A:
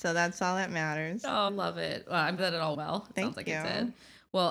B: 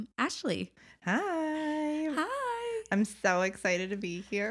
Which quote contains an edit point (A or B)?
A